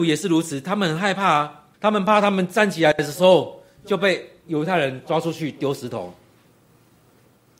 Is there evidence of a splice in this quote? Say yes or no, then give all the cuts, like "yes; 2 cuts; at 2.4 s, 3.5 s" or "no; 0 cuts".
yes; 1 cut; at 1.7 s